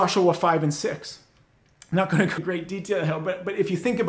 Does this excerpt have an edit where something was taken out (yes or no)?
yes